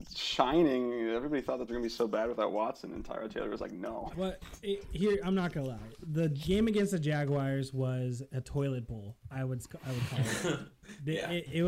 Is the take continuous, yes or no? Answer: no